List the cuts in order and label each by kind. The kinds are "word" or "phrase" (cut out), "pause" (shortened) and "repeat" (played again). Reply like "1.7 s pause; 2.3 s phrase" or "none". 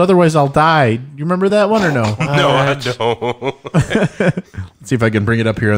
none